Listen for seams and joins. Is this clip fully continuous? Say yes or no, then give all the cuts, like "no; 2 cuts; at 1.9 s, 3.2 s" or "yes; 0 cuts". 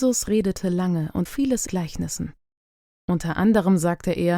no; 2 cuts; at 1.3 s, 1.7 s